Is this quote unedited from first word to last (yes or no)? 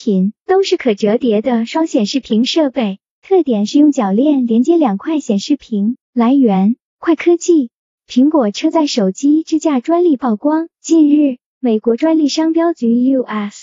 no